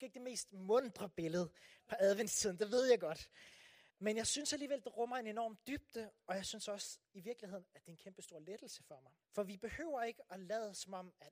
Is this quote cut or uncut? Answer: cut